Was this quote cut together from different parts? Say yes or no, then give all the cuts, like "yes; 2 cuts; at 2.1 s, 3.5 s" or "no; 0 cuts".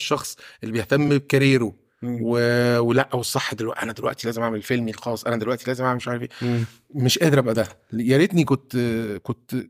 no; 0 cuts